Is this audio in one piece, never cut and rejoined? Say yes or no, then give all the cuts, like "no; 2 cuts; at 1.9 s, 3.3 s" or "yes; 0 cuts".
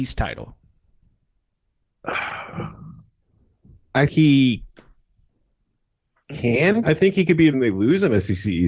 no; 3 cuts; at 4.1 s, 6.8 s, 7.5 s